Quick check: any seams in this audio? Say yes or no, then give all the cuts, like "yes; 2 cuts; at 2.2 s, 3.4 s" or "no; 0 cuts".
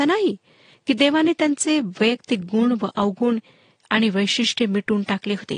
no; 0 cuts